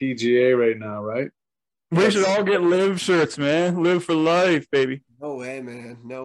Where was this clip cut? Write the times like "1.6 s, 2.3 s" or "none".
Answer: none